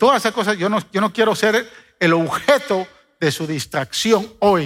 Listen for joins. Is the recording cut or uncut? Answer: uncut